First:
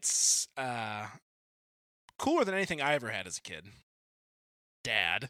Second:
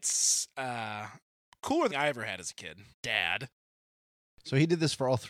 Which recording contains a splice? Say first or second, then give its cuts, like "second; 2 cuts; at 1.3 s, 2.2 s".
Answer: second; 3 cuts; at 1.3 s, 1.9 s, 2.9 s